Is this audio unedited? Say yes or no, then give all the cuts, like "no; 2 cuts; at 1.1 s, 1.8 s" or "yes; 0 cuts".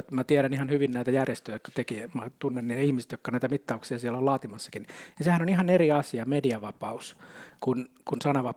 yes; 0 cuts